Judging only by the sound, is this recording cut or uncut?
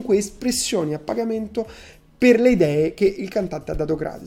uncut